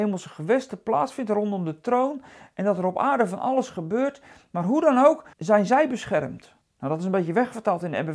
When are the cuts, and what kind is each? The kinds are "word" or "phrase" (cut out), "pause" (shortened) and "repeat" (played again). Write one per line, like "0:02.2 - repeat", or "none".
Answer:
0:05.3 - pause
0:06.6 - pause